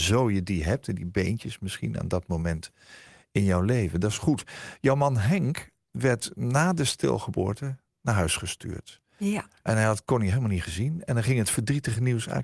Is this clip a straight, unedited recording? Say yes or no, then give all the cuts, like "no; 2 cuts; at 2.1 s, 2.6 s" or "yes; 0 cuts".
yes; 0 cuts